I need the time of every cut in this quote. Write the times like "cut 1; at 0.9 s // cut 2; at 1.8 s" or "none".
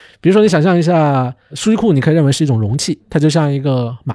none